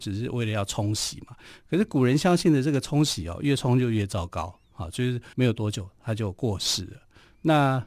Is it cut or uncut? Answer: cut